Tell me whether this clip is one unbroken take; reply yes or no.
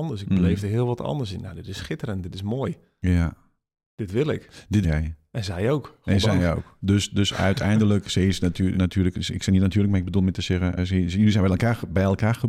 no